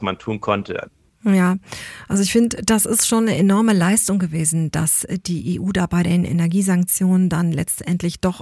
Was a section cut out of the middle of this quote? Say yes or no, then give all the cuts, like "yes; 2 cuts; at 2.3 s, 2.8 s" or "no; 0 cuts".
no; 0 cuts